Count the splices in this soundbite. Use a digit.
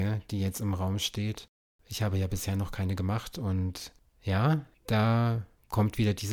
0